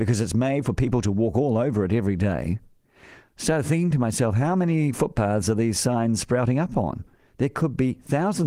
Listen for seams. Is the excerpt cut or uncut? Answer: uncut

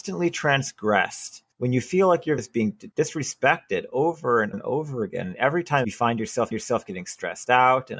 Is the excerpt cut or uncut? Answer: cut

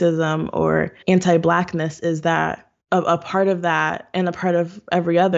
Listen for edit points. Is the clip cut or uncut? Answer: cut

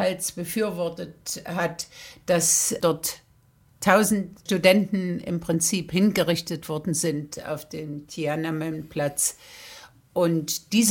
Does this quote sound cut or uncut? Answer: uncut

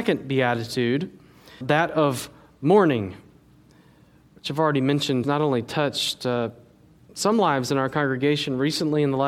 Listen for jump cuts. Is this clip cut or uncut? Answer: cut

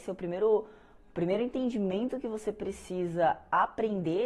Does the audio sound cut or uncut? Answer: uncut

